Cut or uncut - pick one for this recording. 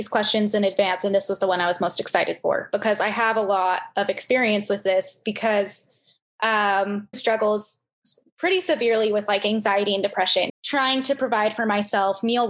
cut